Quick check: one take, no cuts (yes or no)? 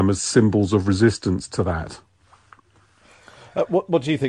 yes